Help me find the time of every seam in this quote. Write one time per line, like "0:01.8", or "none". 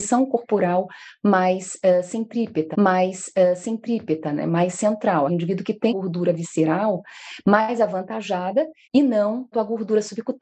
0:02.7
0:05.3
0:05.9
0:08.8
0:09.5